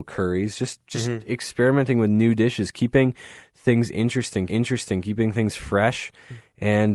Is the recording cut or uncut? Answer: cut